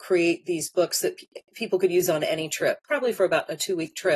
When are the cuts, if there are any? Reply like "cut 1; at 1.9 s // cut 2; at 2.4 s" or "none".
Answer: cut 1; at 2.8 s